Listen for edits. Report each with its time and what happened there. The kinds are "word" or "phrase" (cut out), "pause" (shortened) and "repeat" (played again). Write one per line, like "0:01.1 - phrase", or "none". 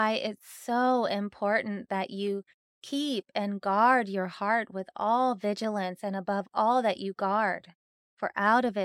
none